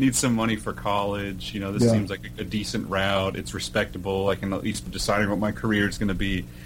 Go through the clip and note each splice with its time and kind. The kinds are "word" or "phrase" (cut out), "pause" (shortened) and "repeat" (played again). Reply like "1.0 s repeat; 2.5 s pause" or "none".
4.9 s phrase